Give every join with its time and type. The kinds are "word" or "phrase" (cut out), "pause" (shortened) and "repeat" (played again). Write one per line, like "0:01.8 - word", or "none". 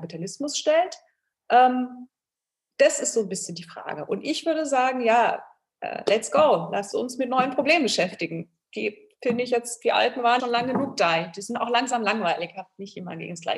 0:06.9 - word
0:10.4 - word